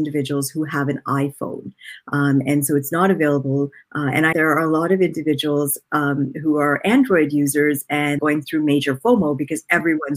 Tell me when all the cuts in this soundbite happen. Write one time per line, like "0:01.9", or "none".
0:04.3
0:08.2